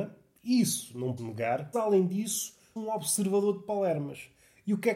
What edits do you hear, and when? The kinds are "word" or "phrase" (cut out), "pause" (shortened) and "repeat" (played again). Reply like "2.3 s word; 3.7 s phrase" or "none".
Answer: 1.2 s word; 1.7 s word; 2.8 s word